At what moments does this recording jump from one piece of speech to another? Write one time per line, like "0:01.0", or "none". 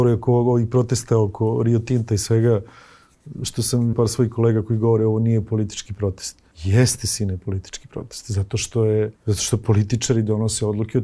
0:03.9
0:06.5
0:09.2